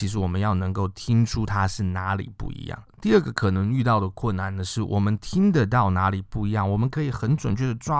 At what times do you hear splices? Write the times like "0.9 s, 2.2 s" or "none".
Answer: none